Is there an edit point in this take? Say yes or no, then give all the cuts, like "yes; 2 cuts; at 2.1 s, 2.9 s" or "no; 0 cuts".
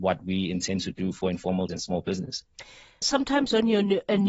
yes; 2 cuts; at 1.7 s, 3.0 s